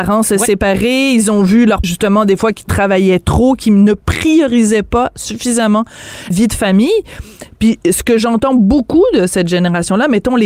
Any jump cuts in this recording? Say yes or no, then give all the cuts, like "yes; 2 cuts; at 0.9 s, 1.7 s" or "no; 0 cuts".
yes; 2 cuts; at 1.8 s, 6.3 s